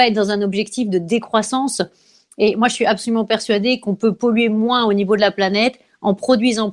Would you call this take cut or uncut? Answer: uncut